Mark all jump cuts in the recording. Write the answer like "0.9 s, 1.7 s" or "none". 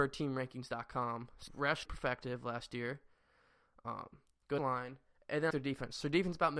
1.5 s, 1.9 s, 4.6 s, 5.5 s